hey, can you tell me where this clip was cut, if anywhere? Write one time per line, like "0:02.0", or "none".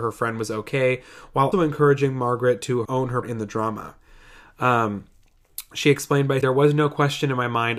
0:01.5
0:02.8
0:03.2
0:06.4